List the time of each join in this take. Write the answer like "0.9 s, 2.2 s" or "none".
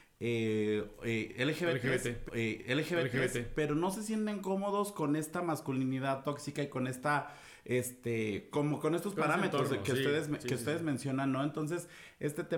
2.3 s, 8.5 s